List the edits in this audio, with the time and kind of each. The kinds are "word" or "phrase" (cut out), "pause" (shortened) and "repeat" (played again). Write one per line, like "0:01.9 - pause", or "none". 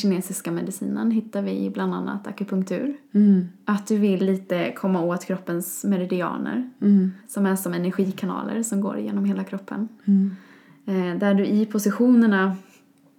0:03.0 - pause
0:07.2 - pause

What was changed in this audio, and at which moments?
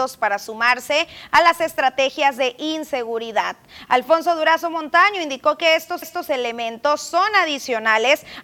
0:06.0 - repeat

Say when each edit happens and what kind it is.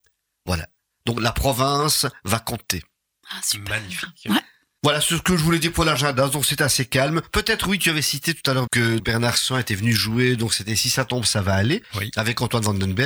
0:08.7 - word
0:09.0 - word

